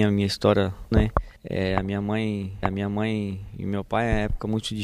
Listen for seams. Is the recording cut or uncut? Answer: cut